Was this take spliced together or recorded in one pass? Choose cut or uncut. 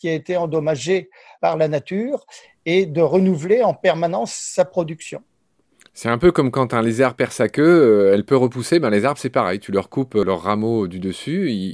uncut